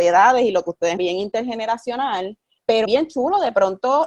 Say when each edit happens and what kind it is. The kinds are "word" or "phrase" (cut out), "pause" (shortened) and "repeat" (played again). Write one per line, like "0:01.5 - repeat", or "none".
0:01.0 - word
0:02.8 - word